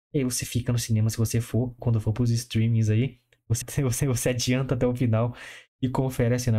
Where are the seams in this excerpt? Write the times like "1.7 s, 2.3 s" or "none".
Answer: 1.8 s, 3.6 s, 4.0 s